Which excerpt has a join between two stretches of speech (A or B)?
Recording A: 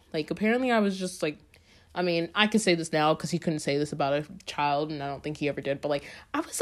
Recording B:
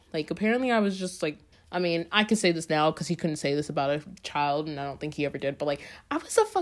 B